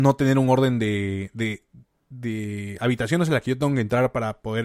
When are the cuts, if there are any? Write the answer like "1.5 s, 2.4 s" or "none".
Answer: none

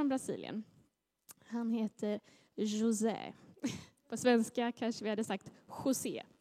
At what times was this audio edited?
none

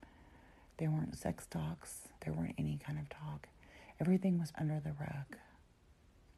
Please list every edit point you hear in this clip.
2.1 s, 4.5 s

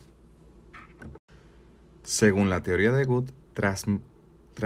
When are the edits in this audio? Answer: none

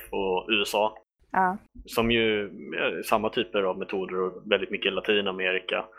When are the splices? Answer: none

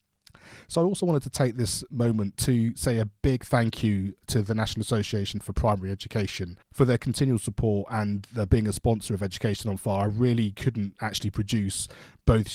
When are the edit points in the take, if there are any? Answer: 6.6 s

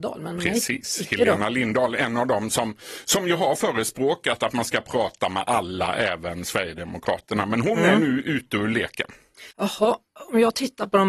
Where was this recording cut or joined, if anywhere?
9.5 s

